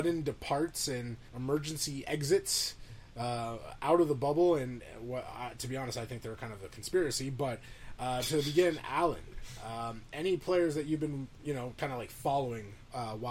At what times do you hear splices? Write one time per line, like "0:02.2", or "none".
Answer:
0:01.3